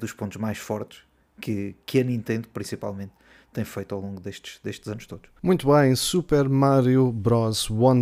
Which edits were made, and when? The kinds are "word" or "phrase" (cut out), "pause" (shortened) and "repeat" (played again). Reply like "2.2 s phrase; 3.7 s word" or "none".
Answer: 5.4 s pause